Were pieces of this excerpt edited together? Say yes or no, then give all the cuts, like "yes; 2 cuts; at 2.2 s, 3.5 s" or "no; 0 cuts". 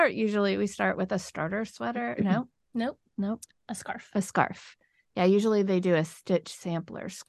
no; 0 cuts